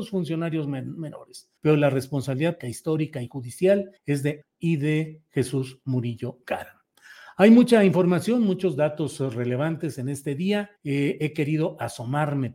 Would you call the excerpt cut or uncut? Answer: cut